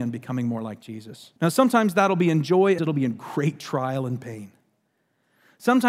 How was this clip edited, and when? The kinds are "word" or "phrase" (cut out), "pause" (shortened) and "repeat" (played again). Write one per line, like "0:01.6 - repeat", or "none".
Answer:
0:01.4 - pause
0:02.8 - phrase